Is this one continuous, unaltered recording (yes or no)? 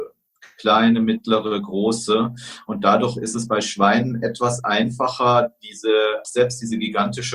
no